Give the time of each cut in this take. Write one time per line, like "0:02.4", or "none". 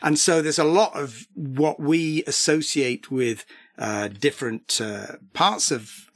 none